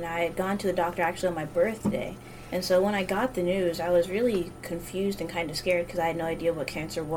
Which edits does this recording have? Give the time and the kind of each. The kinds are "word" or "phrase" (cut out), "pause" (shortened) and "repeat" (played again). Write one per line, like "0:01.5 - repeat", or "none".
none